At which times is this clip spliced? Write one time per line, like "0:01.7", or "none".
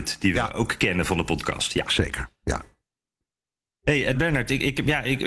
0:04.1